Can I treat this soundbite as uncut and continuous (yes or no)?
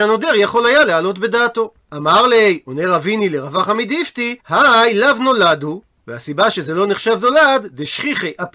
no